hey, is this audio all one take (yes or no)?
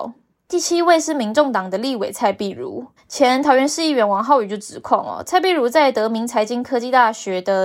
no